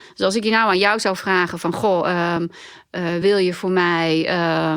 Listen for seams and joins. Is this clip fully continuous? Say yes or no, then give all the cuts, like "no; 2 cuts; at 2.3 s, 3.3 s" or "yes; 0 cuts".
yes; 0 cuts